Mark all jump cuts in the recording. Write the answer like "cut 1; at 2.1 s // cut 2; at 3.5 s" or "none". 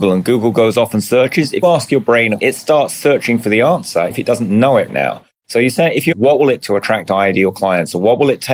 cut 1; at 1.6 s // cut 2; at 2.4 s // cut 3; at 4.1 s // cut 4; at 4.9 s // cut 5; at 6.1 s // cut 6; at 6.6 s